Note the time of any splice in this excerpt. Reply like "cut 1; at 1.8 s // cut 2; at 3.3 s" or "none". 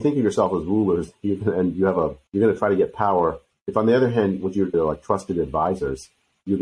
cut 1; at 2.3 s // cut 2; at 3.5 s // cut 3; at 4.7 s